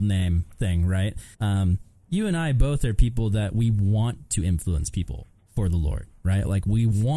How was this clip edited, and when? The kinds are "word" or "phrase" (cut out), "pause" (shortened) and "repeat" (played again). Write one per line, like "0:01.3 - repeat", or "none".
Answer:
0:01.3 - pause